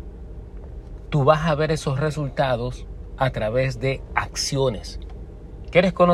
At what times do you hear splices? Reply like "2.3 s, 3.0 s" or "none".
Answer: none